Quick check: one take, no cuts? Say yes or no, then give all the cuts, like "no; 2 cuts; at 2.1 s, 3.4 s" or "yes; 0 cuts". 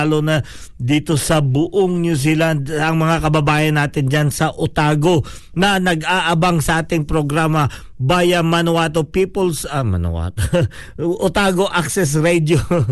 yes; 0 cuts